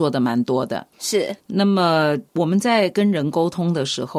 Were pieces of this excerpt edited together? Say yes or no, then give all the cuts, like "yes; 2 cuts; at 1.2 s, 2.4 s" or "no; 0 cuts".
yes; 2 cuts; at 0.9 s, 2.3 s